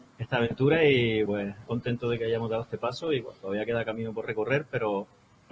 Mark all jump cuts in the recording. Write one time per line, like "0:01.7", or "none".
0:01.3
0:01.7

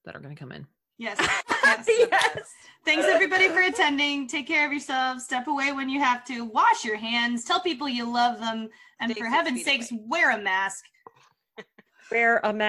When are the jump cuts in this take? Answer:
none

